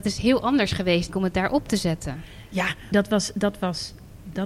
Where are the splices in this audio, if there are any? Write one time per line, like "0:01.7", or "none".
0:01.1
0:02.9

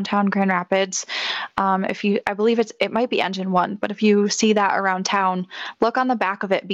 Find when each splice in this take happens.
none

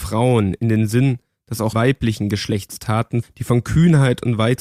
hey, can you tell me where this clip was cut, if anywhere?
0:01.7
0:03.2

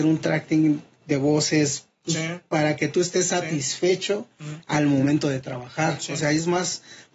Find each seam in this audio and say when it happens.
none

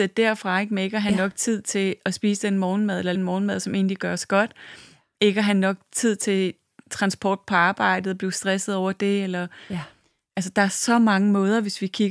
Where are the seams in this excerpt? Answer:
0:03.1

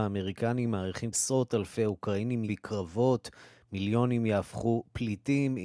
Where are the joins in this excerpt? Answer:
0:01.1
0:02.5

